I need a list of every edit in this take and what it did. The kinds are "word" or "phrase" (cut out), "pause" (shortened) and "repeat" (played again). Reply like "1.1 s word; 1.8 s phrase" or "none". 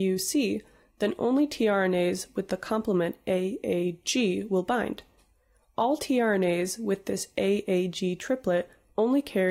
none